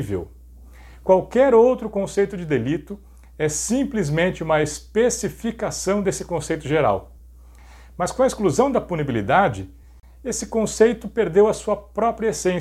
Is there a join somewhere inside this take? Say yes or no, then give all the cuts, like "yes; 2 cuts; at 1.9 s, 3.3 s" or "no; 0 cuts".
no; 0 cuts